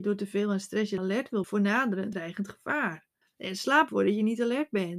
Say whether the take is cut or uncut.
cut